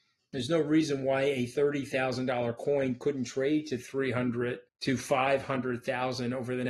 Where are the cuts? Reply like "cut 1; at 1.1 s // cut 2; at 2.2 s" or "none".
cut 1; at 4.7 s